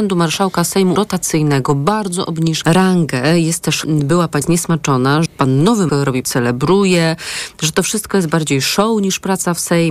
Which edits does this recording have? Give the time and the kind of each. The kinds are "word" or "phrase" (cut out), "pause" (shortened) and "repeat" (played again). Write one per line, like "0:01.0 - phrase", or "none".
0:01.0 - word
0:02.6 - word
0:03.8 - word
0:04.4 - word
0:05.3 - word
0:05.9 - word
0:06.2 - word

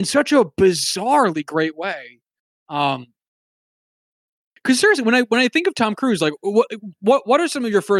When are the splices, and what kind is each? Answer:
none

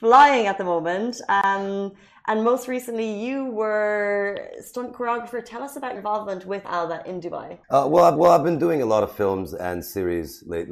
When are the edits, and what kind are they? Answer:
0:06.0 - word
0:06.6 - phrase
0:07.6 - pause
0:08.2 - repeat

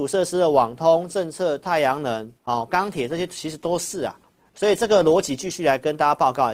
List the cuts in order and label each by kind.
0:02.4 - pause
0:04.4 - pause

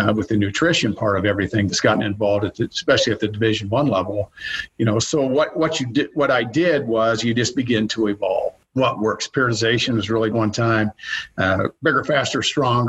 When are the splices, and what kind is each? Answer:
0:08.6 - pause
0:10.3 - phrase

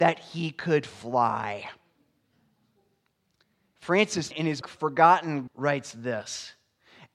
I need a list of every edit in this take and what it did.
0:04.3 - word
0:04.6 - word
0:05.5 - word

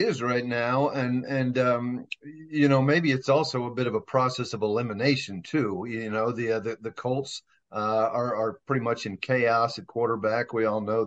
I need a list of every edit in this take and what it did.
none

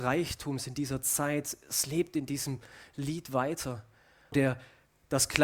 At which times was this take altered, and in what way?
0:04.3 - word

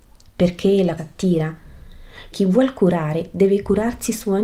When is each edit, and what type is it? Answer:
0:01.0 - word
0:02.3 - word

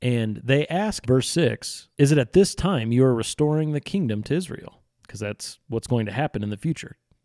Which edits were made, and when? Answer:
0:01.0 - word
0:01.9 - pause
0:04.9 - pause

